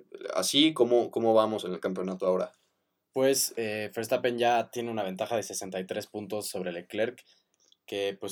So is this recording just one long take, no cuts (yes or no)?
yes